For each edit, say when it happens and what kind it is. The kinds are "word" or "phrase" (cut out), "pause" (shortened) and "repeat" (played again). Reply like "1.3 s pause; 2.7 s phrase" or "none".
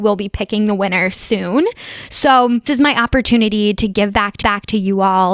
2.7 s word; 4.4 s repeat